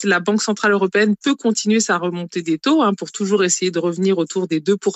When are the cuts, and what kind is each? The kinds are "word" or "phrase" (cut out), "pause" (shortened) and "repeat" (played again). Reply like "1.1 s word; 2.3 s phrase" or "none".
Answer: none